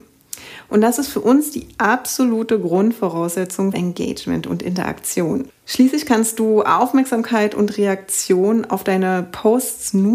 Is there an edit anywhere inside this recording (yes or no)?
yes